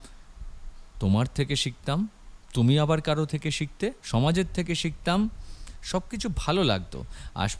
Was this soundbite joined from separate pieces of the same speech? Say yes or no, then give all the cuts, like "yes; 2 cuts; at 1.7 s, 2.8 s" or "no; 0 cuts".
yes; 1 cut; at 4.0 s